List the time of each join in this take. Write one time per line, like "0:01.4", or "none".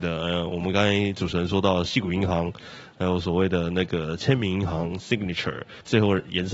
none